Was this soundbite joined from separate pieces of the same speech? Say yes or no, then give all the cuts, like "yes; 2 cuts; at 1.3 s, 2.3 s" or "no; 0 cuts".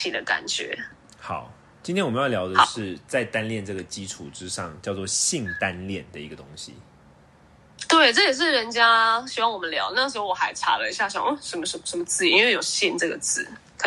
no; 0 cuts